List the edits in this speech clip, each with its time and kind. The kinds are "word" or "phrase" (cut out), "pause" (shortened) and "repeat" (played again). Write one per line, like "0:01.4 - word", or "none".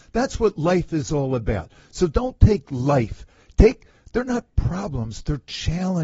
none